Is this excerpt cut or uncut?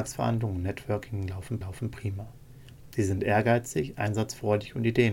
cut